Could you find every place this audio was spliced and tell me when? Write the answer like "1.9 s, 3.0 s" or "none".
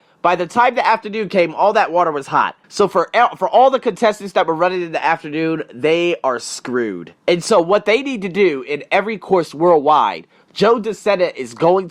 2.6 s, 7.2 s